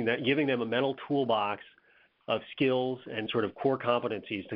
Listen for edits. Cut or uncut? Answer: cut